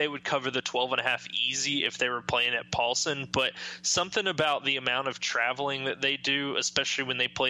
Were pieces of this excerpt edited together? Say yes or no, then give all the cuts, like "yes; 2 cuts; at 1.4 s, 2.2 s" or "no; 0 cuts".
no; 0 cuts